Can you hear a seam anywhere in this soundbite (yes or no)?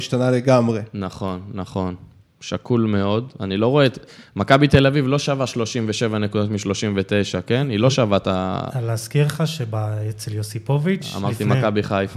no